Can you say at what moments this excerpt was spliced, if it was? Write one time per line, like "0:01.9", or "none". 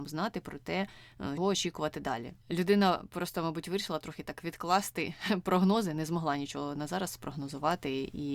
0:01.4